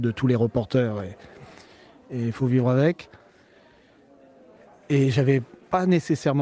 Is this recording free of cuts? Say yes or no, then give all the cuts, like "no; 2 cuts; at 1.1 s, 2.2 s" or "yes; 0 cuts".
yes; 0 cuts